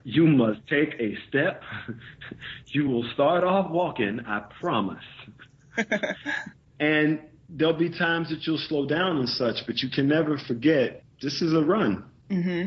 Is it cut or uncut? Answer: uncut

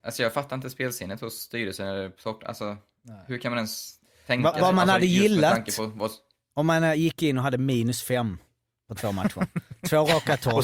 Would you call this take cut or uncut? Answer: uncut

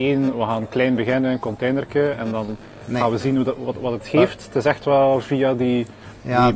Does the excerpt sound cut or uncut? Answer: uncut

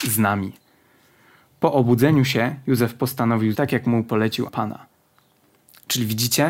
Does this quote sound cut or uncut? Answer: cut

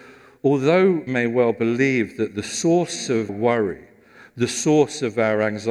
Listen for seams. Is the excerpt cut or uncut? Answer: cut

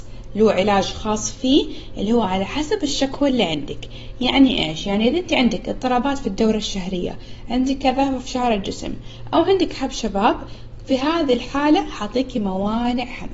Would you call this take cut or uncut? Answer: uncut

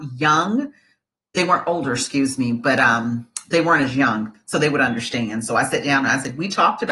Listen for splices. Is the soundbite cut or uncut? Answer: uncut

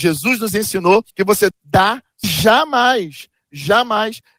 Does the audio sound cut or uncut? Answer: cut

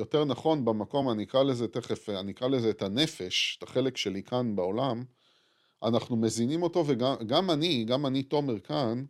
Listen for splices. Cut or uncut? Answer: uncut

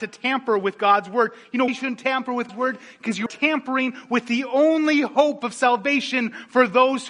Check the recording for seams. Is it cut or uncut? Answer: cut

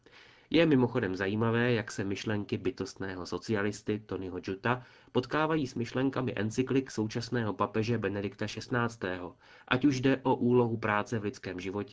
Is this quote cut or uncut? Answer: uncut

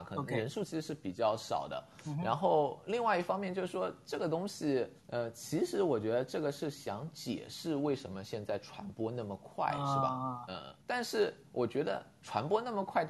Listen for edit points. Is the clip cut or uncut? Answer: cut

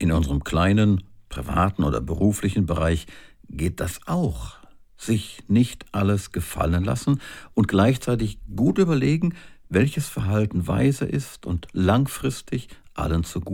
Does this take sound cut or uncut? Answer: uncut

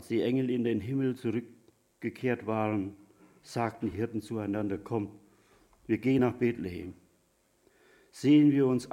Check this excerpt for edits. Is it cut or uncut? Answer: uncut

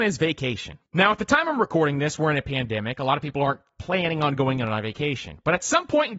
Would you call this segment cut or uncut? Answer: uncut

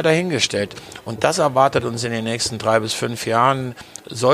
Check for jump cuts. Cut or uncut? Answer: uncut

